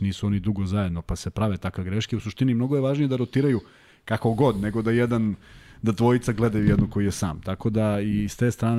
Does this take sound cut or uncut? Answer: uncut